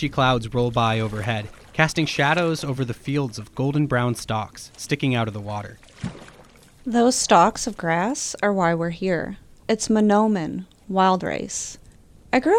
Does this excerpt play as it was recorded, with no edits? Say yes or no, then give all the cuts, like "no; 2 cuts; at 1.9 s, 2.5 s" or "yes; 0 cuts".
yes; 0 cuts